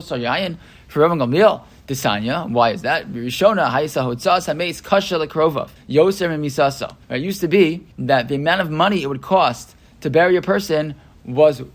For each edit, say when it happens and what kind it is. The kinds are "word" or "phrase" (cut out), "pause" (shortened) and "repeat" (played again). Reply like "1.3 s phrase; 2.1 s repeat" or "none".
5.8 s pause; 7.0 s pause; 7.9 s pause